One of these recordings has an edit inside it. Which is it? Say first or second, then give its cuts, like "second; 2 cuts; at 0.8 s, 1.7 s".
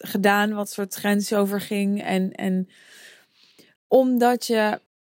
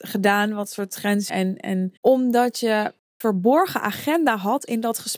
second; 3 cuts; at 1.3 s, 2.0 s, 3.2 s